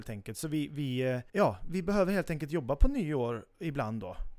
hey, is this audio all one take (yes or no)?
no